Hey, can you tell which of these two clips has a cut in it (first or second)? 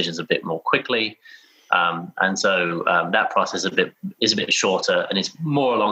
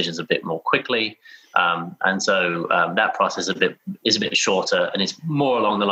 second